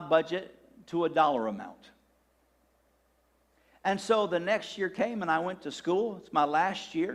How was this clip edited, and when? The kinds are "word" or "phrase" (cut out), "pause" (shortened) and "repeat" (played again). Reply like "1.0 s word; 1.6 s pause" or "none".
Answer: none